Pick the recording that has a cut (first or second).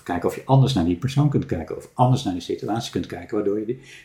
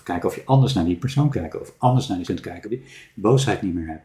second